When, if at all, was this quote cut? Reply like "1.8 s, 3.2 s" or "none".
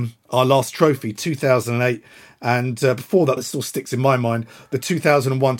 3.4 s